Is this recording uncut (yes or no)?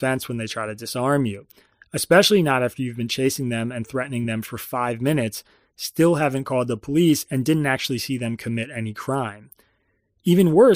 yes